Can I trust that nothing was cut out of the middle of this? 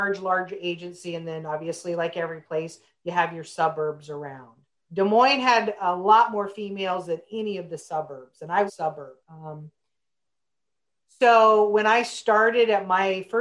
no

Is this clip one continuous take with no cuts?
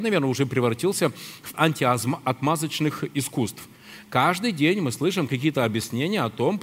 no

